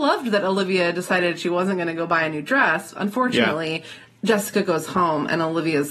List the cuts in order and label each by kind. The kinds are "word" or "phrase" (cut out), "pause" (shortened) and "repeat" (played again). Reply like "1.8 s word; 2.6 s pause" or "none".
none